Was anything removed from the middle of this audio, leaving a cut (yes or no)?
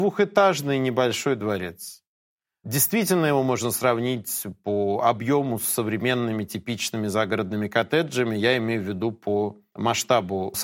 no